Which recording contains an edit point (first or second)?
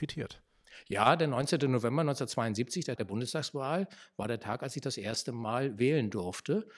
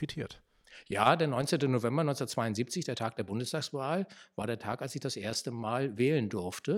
first